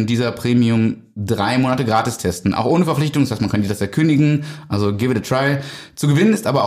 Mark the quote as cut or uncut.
uncut